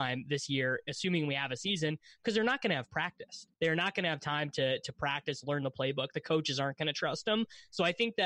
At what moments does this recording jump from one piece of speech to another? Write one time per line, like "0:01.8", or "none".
0:03.5